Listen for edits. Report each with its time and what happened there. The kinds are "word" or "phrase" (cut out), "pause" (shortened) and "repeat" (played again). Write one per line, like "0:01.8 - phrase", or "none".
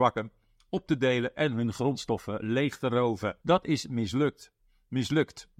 0:03.4 - pause